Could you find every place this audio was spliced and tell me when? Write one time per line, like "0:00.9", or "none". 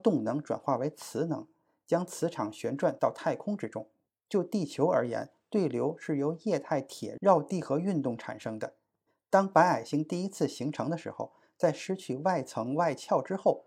none